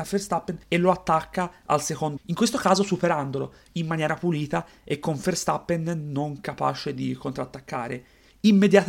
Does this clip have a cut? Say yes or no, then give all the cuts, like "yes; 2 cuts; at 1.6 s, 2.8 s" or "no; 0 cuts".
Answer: yes; 1 cut; at 2.2 s